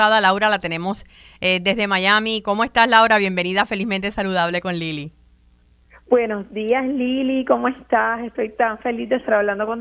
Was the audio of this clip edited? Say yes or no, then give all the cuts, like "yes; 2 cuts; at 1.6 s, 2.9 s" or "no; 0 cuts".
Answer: no; 0 cuts